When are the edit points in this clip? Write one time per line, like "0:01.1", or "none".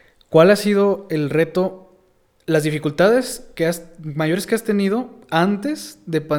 none